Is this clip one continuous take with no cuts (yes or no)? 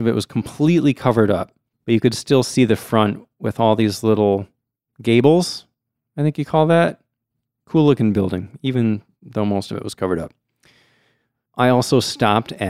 yes